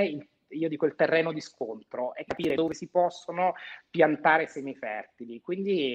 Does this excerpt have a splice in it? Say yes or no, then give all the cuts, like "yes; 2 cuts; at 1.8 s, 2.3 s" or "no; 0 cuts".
yes; 1 cut; at 2.3 s